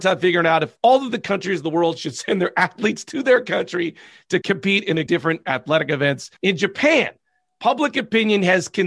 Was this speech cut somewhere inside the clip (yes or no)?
yes